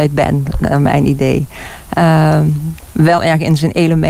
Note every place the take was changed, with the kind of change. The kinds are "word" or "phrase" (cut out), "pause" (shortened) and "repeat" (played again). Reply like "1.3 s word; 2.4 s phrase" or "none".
3.2 s word